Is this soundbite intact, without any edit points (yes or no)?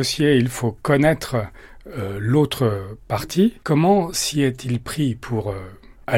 no